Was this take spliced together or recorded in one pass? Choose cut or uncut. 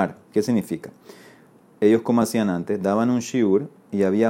uncut